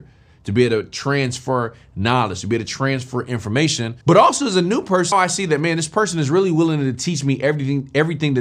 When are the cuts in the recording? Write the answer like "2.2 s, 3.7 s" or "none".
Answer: 4.0 s, 5.1 s